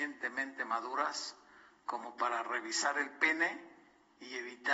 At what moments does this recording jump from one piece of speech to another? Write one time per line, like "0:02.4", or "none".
none